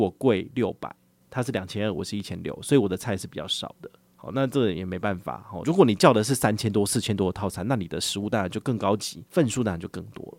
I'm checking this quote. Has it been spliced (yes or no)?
yes